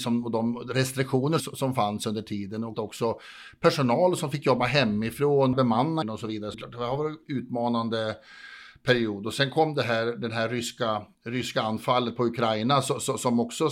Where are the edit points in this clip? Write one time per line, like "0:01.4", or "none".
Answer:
0:01.4
0:02.7
0:05.5
0:06.0
0:06.5
0:11.1